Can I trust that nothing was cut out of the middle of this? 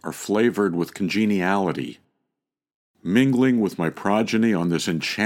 yes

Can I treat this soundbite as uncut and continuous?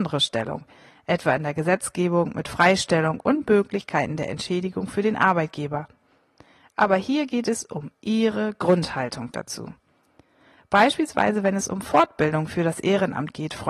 yes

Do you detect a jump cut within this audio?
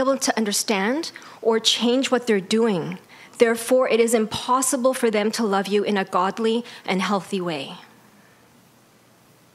no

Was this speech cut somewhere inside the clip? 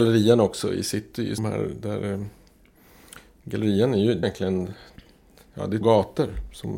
yes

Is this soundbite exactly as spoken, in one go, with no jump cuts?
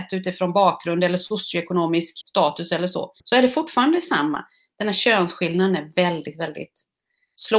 no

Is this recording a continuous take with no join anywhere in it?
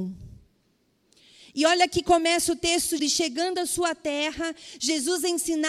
no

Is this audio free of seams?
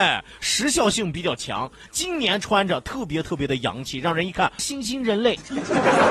no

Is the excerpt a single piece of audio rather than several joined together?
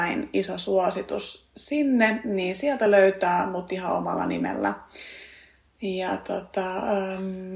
yes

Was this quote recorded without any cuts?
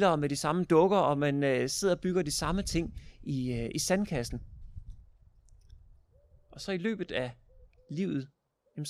yes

